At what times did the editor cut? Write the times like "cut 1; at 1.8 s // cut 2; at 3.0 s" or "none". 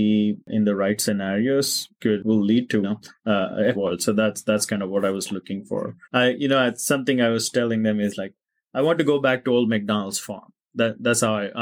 cut 1; at 2.8 s // cut 2; at 3.7 s // cut 3; at 6.0 s